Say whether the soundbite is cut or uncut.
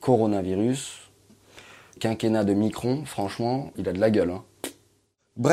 cut